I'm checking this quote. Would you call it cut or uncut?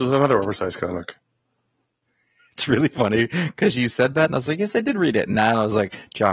uncut